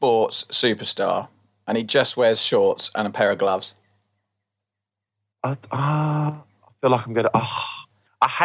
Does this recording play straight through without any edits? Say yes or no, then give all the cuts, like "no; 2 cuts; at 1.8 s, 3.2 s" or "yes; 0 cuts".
yes; 0 cuts